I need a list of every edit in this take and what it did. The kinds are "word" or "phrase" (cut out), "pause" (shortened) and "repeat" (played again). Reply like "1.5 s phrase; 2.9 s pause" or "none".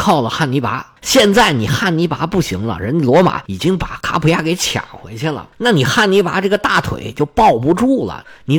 1.0 s pause; 5.5 s pause